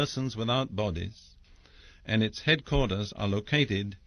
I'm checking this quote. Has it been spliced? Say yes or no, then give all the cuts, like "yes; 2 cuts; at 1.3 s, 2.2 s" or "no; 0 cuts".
no; 0 cuts